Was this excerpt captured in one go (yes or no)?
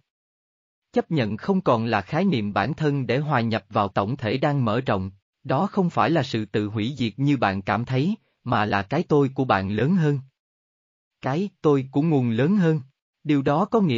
no